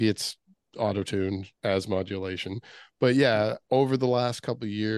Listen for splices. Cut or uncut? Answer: cut